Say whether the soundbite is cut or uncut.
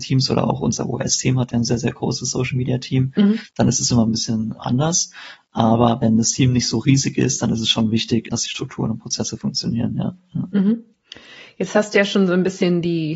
uncut